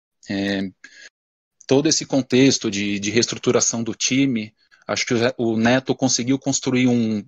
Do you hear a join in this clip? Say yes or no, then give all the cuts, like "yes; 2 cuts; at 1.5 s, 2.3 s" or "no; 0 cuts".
no; 0 cuts